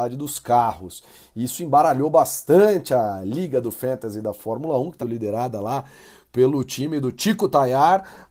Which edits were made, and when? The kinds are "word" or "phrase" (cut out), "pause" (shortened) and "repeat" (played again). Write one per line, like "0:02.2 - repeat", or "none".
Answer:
0:05.0 - word